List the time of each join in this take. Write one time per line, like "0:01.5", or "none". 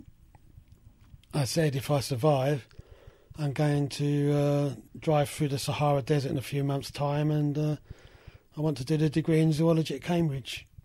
0:01.2
0:04.9

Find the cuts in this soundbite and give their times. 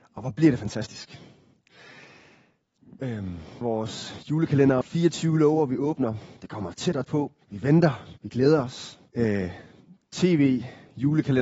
0:03.6
0:04.8
0:06.4
0:07.0
0:07.4
0:08.2
0:09.1

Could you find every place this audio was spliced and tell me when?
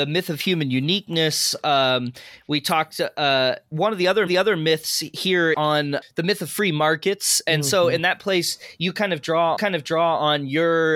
0:03.7
0:04.3
0:05.5
0:06.0
0:09.6

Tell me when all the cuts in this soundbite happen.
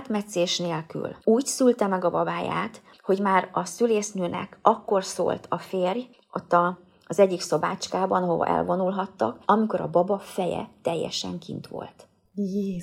0:01.2
0:09.4

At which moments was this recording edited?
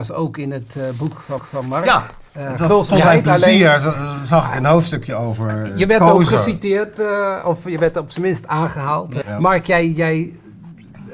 0:01.4
0:02.3
0:09.2

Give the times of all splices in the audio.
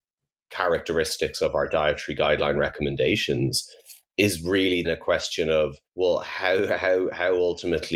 0:04.8
0:05.9

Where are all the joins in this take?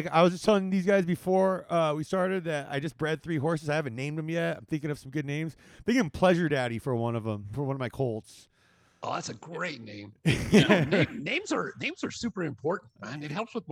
none

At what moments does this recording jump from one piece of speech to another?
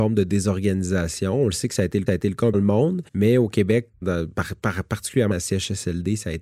0:02.1
0:02.5
0:03.1
0:04.0
0:05.3

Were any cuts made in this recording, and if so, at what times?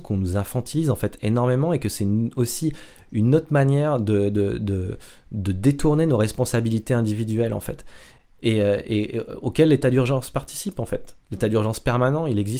none

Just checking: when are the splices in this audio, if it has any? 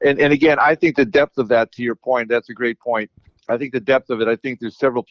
none

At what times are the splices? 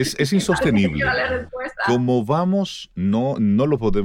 none

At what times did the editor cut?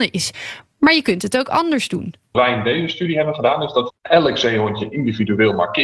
0:02.3
0:03.9

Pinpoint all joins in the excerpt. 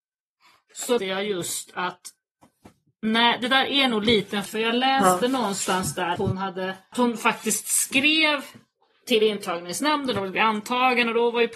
0:01.0
0:04.5
0:06.2
0:06.9

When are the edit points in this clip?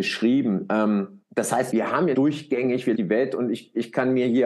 0:01.2
0:01.7
0:02.1
0:02.9

